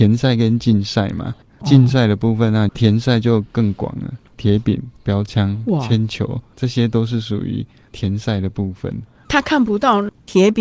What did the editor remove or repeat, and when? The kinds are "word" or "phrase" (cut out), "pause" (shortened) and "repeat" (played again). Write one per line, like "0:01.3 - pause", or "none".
0:02.7 - phrase